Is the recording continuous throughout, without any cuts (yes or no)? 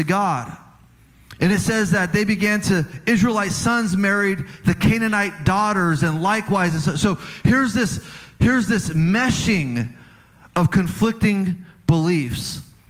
yes